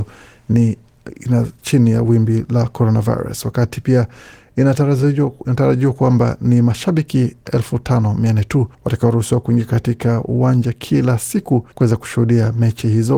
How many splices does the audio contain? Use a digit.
2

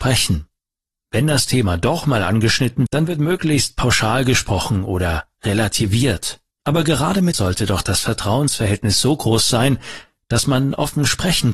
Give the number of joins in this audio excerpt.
3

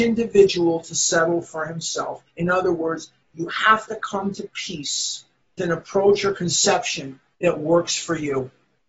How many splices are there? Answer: 3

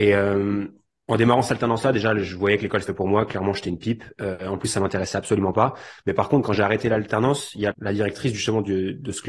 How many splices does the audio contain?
2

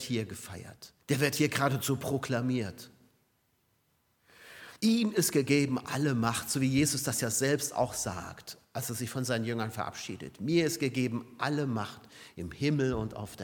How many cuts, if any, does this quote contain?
2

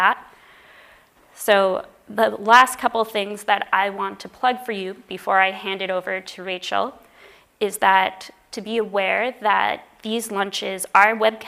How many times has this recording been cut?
0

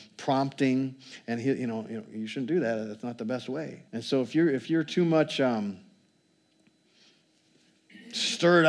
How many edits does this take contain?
1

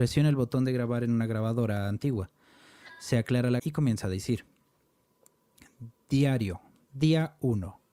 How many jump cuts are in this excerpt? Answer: 1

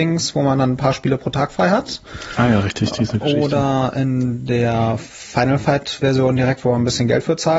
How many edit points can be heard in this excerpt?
0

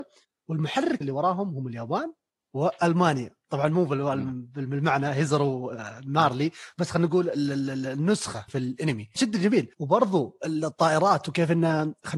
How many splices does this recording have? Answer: 4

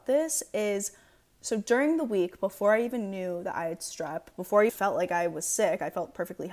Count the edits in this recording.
1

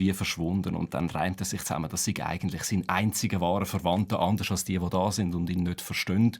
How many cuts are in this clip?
0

